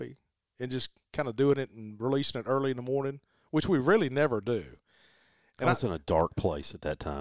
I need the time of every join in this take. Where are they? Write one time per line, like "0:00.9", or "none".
none